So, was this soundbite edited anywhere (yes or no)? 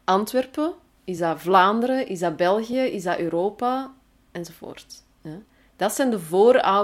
no